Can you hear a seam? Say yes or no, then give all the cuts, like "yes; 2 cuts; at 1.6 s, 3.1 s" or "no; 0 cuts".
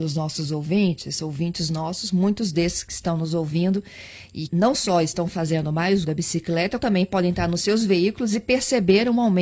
yes; 3 cuts; at 4.5 s, 6.0 s, 6.8 s